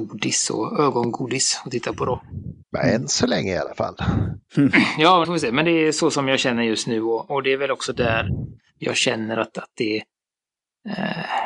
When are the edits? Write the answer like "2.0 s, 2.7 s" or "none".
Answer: 2.6 s, 5.2 s